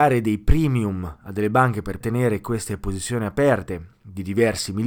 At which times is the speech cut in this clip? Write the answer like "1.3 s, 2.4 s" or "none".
2.0 s